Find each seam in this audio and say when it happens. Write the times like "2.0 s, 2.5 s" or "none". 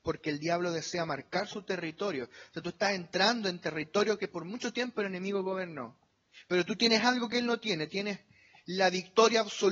none